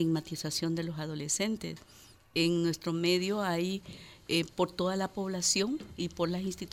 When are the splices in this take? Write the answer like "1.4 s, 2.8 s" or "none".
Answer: none